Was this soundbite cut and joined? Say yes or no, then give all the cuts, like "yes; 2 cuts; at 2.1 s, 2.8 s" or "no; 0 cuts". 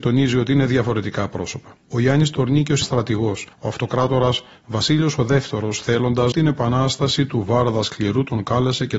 yes; 4 cuts; at 1.8 s, 2.8 s, 3.5 s, 6.3 s